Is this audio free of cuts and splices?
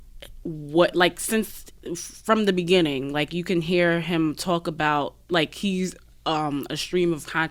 yes; 0 cuts

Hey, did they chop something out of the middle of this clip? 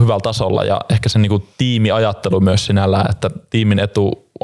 yes; 1 cut; at 1.5 s

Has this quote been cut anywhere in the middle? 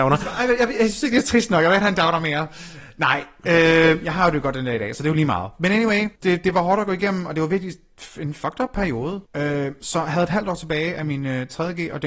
yes; 2 cuts; at 6.2 s, 9.3 s

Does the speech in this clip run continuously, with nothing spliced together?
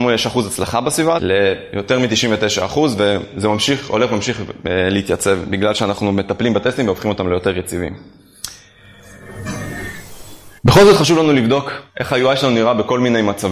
no; 2 cuts; at 1.2 s, 10.6 s

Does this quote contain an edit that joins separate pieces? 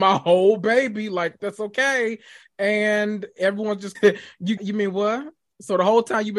yes; 3 cuts; at 1.4 s, 3.9 s, 4.6 s

